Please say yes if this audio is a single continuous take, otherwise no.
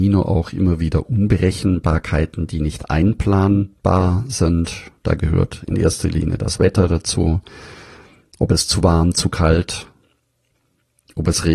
yes